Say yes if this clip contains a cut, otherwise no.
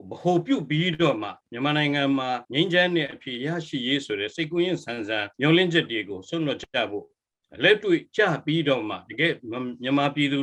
yes